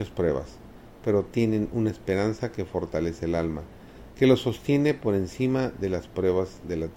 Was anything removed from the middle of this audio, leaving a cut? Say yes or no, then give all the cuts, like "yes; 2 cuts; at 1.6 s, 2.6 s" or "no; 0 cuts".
no; 0 cuts